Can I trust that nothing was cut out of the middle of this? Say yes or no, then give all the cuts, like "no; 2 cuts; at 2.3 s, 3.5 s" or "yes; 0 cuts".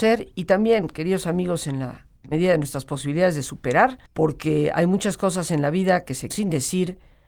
no; 3 cuts; at 2.2 s, 4.1 s, 6.3 s